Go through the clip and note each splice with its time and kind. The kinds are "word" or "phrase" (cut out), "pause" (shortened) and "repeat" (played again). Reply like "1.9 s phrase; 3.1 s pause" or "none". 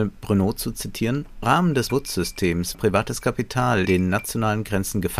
1.4 s word; 1.9 s word; 2.7 s word; 3.9 s word